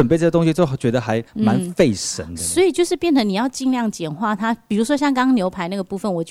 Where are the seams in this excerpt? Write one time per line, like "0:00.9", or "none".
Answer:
0:01.3

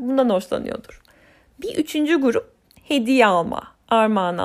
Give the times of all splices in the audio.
none

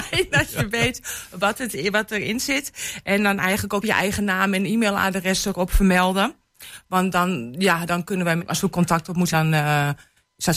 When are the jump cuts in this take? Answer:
0:03.8
0:07.9
0:08.4
0:09.3

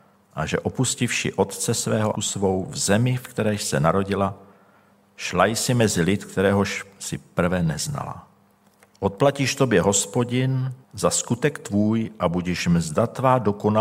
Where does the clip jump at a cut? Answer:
0:02.1
0:08.5
0:10.8

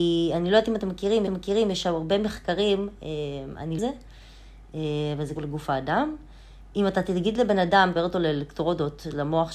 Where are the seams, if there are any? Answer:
0:01.3
0:03.8
0:05.4
0:08.0

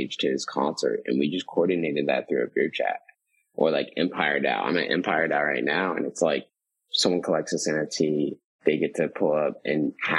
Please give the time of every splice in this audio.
none

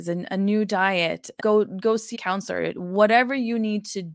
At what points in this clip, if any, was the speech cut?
0:01.4
0:02.1

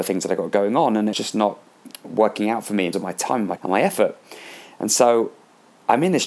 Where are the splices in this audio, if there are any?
0:01.1
0:02.9
0:03.6

